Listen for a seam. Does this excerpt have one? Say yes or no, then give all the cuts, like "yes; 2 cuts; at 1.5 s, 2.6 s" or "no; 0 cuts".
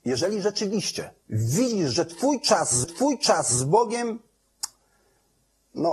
yes; 2 cuts; at 1.2 s, 2.8 s